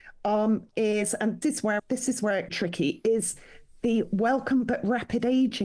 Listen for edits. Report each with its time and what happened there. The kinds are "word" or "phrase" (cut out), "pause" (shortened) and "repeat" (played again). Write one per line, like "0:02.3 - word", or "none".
0:01.4 - phrase
0:01.8 - word
0:02.5 - phrase